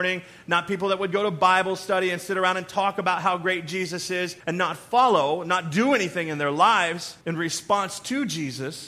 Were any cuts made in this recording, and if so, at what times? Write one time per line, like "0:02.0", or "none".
0:04.4
0:07.2